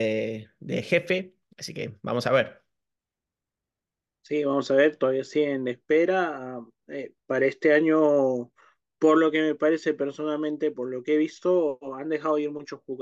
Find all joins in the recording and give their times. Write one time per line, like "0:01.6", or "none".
none

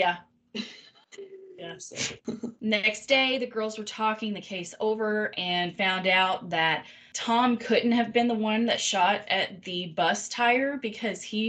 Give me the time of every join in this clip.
none

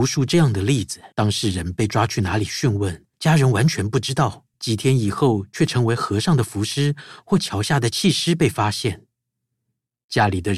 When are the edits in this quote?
0:01.1
0:03.1
0:04.5

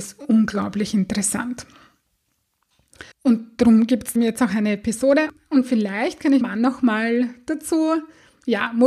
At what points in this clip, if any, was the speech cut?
0:03.1
0:04.2
0:06.4

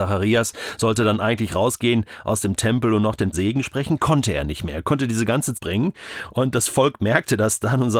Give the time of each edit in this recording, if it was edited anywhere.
0:03.3
0:05.5

